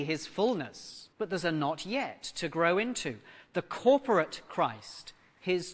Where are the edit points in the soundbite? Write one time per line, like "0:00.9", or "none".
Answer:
0:01.1

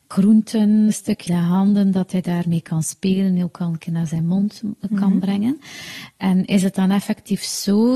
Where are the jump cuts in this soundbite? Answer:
0:01.3

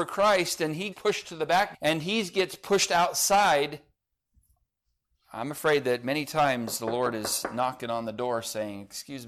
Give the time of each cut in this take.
0:00.9
0:01.7

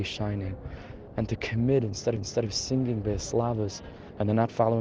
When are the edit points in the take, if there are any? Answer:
0:02.2

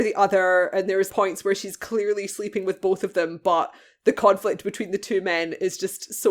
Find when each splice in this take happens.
0:01.1

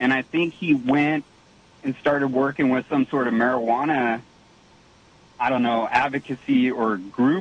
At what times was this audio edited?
none

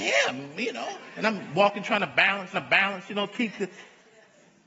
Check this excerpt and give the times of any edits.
0:02.5

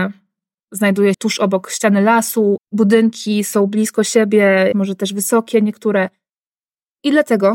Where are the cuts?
0:01.1
0:02.6
0:04.7

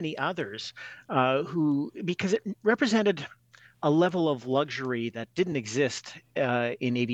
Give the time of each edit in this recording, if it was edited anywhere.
none

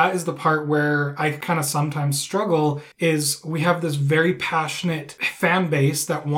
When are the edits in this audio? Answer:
0:02.9

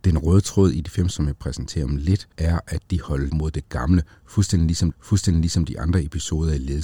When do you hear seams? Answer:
0:01.1
0:02.3
0:03.3
0:04.9

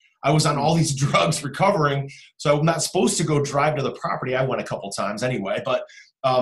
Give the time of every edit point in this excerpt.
none

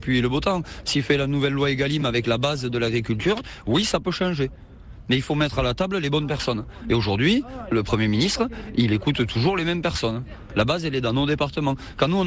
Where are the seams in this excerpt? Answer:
none

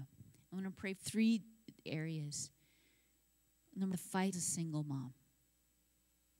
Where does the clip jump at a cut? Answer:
0:01.0
0:01.9
0:03.9
0:04.3

